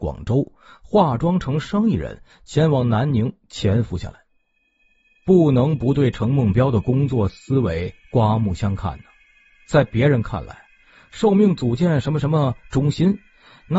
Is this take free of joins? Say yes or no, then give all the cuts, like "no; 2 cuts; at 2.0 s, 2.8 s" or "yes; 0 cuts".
yes; 0 cuts